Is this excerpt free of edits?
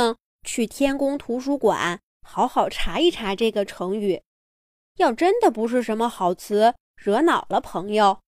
yes; 0 cuts

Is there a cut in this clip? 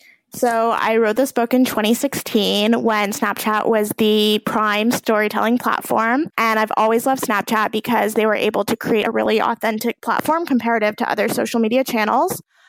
yes; 1 cut; at 6.3 s

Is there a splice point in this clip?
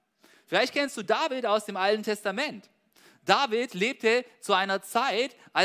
no; 0 cuts

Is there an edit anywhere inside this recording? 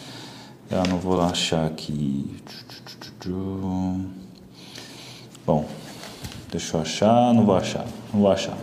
no; 0 cuts

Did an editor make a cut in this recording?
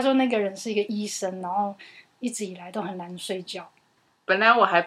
no; 0 cuts

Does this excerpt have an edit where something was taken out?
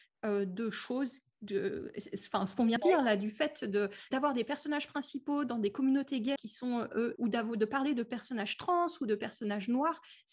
yes; 4 cuts; at 2.8 s, 4.1 s, 6.4 s, 7.2 s

